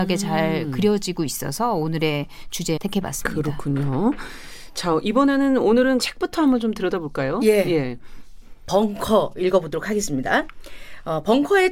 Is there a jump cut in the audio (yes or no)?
yes